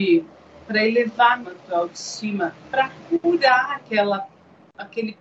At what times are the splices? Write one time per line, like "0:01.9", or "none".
0:01.4
0:02.6

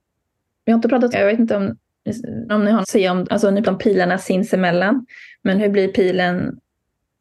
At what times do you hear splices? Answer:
0:01.1
0:02.5
0:02.8
0:03.2
0:03.6

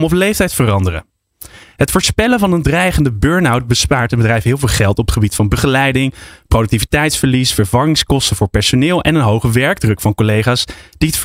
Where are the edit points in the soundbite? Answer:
none

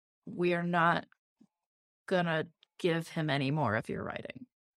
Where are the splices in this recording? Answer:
none

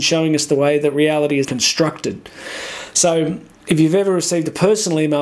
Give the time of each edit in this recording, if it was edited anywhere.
0:01.4

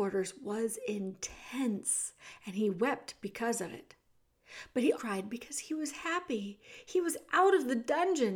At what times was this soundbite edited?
0:04.9

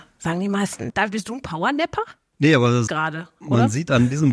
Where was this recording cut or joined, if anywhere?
0:02.9

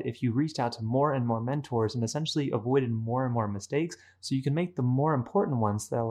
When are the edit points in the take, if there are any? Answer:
none

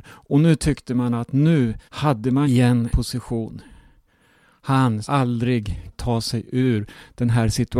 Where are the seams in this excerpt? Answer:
0:01.9
0:02.4
0:02.9
0:05.0
0:05.9

